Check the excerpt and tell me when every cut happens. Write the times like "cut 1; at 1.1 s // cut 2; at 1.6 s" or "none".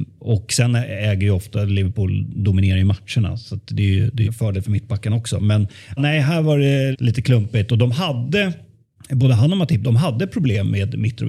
cut 1; at 4.3 s // cut 2; at 6.0 s // cut 3; at 6.9 s // cut 4; at 9.0 s

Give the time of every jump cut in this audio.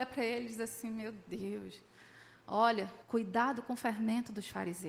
cut 1; at 3.0 s

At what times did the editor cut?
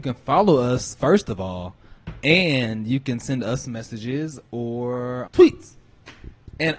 cut 1; at 5.3 s

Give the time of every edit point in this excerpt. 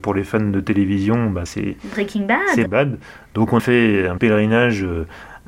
cut 1; at 1.5 s // cut 2; at 2.7 s // cut 3; at 3.6 s // cut 4; at 4.2 s

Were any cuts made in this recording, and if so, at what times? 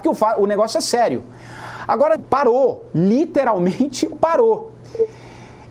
cut 1; at 2.2 s // cut 2; at 4.1 s

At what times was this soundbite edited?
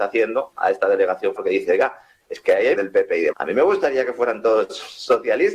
cut 1; at 1.4 s // cut 2; at 2.7 s // cut 3; at 3.3 s

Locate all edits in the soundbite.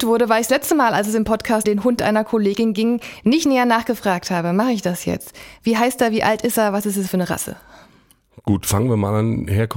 cut 1; at 1.6 s

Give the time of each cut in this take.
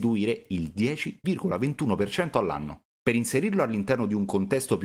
none

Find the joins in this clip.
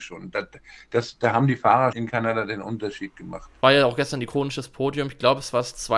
cut 1; at 1.9 s // cut 2; at 3.6 s

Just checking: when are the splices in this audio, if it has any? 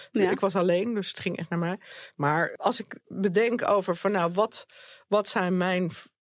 none

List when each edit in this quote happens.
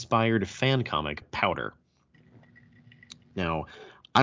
cut 1; at 1.2 s

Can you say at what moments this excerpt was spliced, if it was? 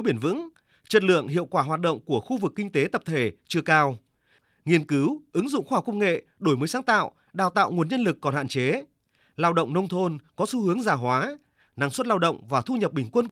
none

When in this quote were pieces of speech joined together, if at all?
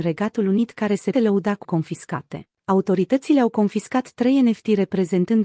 cut 1; at 1.1 s // cut 2; at 1.6 s // cut 3; at 2.6 s

